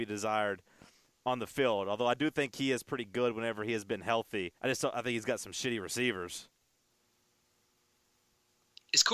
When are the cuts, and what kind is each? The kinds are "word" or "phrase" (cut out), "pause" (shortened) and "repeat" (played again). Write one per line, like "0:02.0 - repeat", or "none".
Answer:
0:04.6 - pause